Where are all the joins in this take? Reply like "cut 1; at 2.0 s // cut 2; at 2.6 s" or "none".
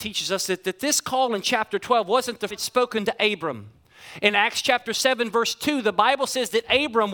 cut 1; at 2.5 s